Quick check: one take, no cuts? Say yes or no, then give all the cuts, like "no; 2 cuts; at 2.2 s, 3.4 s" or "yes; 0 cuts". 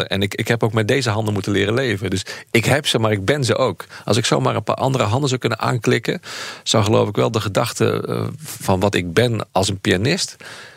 no; 1 cut; at 9.5 s